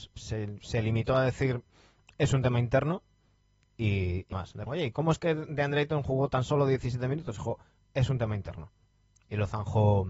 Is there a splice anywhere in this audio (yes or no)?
yes